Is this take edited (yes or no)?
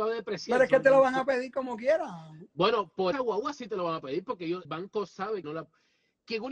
yes